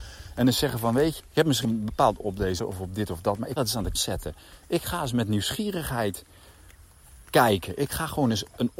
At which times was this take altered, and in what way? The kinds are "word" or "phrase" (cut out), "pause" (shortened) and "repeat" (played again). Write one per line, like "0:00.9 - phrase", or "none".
0:01.2 - word
0:01.6 - word
0:02.2 - word
0:02.6 - word
0:03.6 - word
0:04.0 - word